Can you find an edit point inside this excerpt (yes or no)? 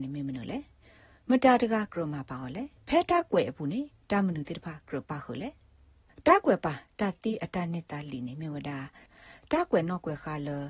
yes